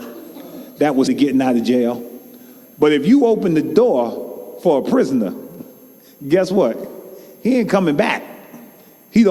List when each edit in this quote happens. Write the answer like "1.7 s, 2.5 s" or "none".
1.1 s